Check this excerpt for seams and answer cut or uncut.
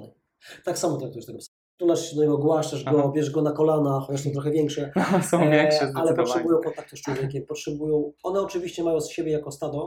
cut